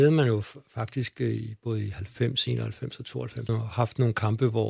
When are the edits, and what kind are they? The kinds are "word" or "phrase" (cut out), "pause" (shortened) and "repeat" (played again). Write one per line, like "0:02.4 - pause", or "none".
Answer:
0:03.5 - phrase